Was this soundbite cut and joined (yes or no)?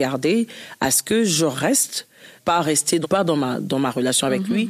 yes